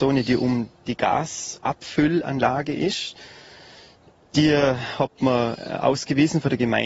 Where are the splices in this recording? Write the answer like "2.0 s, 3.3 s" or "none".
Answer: none